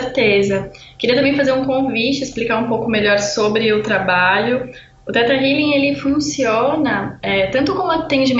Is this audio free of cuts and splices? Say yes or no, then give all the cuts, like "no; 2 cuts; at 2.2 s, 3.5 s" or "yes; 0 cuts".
yes; 0 cuts